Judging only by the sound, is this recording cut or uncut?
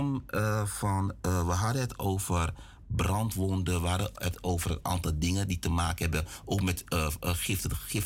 uncut